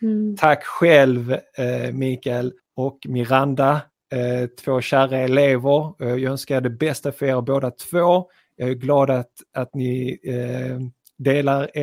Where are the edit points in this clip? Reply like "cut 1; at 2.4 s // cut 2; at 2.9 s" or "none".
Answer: cut 1; at 2.6 s